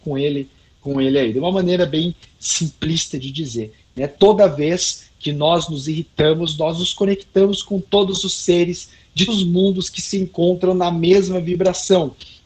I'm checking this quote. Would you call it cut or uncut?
cut